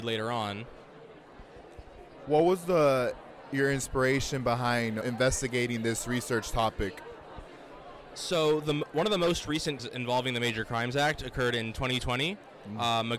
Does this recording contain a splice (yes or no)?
yes